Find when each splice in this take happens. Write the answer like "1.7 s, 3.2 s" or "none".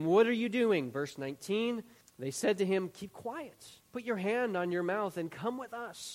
2.0 s, 3.8 s